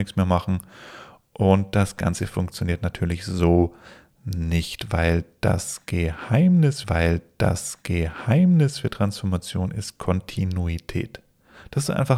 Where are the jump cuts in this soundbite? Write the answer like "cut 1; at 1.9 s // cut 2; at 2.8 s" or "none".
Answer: cut 1; at 6.8 s